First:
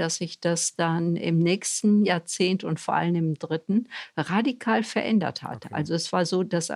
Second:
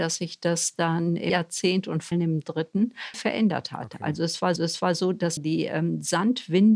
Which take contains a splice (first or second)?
second